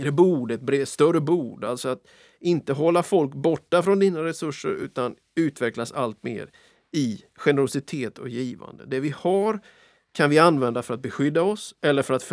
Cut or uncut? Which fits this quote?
uncut